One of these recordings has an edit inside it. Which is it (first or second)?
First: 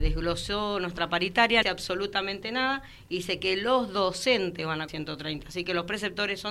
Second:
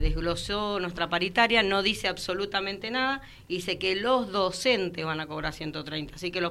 first